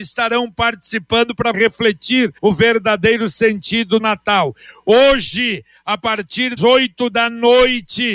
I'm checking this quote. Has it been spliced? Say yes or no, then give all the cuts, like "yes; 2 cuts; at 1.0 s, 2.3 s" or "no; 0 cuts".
yes; 4 cuts; at 1.5 s, 2.4 s, 4.0 s, 6.6 s